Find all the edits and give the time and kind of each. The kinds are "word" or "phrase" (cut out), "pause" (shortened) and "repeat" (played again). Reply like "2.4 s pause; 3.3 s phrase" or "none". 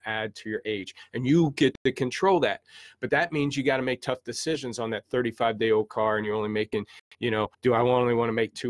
7.5 s pause

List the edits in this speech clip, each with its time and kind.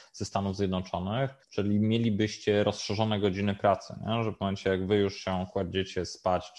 1.4 s pause

